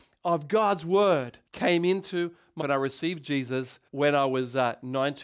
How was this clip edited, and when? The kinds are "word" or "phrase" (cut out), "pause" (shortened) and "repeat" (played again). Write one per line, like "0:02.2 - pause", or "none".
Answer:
0:01.5 - pause
0:02.6 - word
0:03.9 - pause